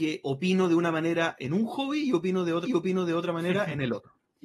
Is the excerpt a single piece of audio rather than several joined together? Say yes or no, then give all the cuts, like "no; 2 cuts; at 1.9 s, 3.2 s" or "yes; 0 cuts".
no; 1 cut; at 2.7 s